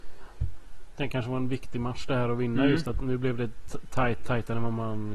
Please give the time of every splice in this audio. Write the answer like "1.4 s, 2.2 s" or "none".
1.1 s